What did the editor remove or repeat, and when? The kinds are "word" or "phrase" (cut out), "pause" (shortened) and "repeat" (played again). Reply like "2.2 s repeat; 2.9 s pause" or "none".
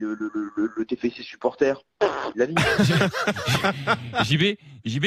1.2 s word; 2.3 s word